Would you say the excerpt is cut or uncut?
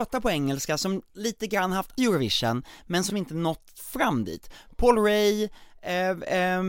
cut